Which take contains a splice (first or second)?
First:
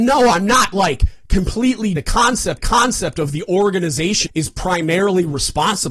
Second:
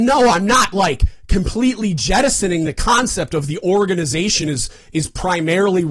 first